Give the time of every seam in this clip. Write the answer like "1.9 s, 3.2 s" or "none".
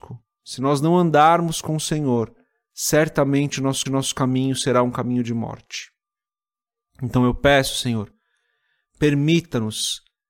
3.9 s